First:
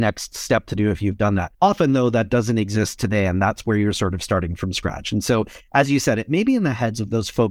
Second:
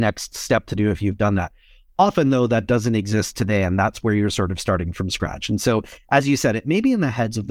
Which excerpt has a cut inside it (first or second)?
first